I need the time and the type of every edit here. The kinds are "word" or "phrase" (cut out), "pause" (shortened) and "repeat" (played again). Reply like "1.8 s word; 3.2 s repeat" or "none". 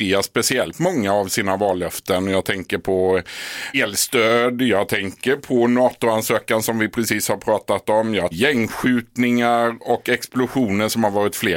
3.7 s word; 8.3 s phrase